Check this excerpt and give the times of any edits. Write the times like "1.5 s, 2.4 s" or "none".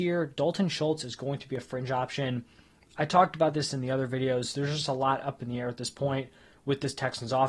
none